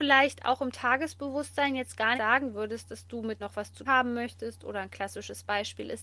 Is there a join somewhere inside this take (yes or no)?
yes